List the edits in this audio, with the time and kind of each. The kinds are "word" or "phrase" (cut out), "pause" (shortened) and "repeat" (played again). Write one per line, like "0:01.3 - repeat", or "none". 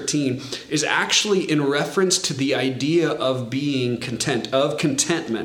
none